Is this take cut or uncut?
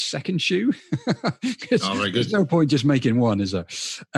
uncut